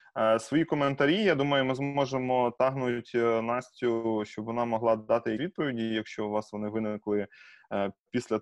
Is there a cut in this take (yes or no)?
yes